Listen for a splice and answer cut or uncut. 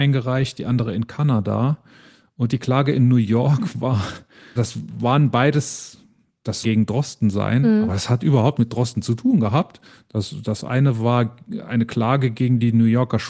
cut